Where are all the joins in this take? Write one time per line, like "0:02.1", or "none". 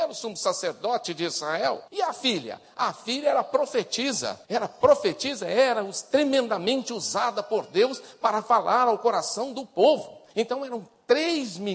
0:01.9
0:04.4
0:10.3